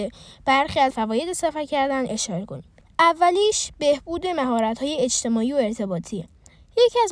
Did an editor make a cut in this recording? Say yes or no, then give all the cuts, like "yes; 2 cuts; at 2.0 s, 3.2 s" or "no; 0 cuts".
yes; 1 cut; at 0.9 s